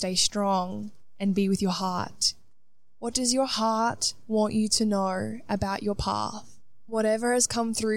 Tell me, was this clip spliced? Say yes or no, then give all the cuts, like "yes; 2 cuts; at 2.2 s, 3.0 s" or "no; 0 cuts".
no; 0 cuts